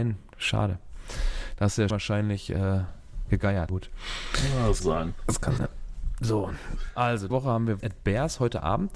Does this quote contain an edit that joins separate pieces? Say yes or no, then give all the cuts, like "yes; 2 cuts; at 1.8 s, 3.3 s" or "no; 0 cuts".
yes; 6 cuts; at 1.9 s, 3.7 s, 4.8 s, 5.6 s, 7.3 s, 7.8 s